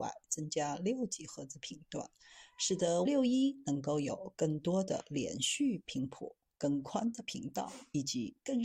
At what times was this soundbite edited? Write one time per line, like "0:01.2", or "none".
0:03.1